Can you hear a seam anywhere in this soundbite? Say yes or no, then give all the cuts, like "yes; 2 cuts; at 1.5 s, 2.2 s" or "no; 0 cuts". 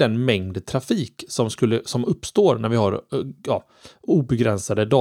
no; 0 cuts